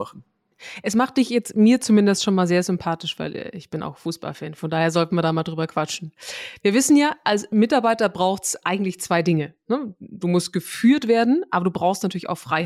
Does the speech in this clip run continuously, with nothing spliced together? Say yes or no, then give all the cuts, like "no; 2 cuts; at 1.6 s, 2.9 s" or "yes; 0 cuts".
yes; 0 cuts